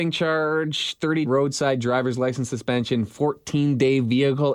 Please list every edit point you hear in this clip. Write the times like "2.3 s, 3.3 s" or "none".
1.3 s